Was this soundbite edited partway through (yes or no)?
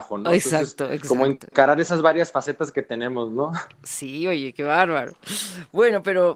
no